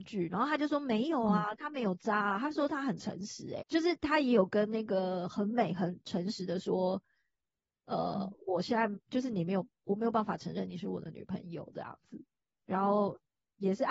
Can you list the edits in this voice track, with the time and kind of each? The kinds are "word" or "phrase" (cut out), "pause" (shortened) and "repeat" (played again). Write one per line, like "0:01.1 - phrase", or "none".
0:03.6 - word